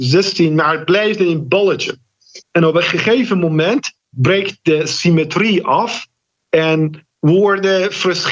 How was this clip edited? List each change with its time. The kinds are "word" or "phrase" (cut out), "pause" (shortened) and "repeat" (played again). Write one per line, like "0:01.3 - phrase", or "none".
0:02.4 - pause